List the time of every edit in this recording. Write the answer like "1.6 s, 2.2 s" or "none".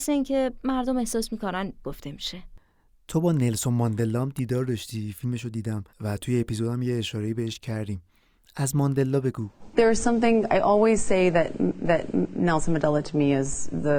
1.8 s, 5.9 s, 11.8 s